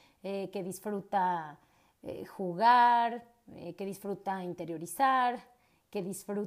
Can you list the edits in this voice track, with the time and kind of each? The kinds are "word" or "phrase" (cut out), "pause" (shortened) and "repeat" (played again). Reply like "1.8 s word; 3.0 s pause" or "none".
none